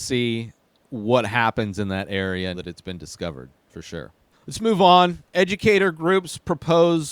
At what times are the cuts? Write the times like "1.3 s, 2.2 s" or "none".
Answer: 2.5 s, 4.3 s, 5.3 s